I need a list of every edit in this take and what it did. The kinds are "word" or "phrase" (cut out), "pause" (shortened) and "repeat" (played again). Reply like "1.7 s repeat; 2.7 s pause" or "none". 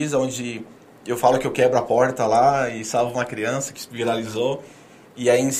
none